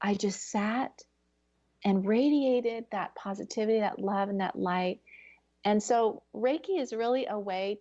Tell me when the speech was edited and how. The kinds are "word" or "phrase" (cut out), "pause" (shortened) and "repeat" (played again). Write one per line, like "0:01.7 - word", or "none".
none